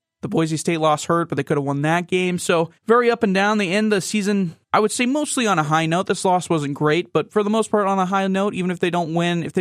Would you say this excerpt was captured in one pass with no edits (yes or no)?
no